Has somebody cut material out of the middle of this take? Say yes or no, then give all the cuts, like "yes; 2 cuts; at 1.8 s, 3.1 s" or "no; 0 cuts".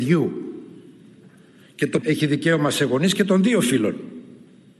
yes; 1 cut; at 2.0 s